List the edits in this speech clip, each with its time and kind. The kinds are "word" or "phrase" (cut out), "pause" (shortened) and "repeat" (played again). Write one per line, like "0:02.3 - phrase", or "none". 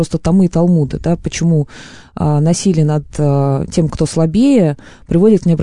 none